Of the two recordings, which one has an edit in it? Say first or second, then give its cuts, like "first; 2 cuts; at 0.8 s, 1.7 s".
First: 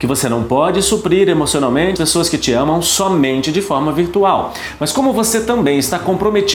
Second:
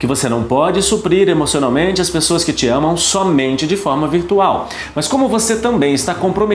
first; 1 cut; at 2.0 s